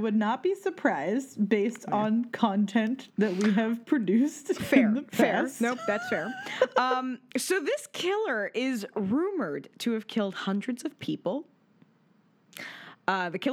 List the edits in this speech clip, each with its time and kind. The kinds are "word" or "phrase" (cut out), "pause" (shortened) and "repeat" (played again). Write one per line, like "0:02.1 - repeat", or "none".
none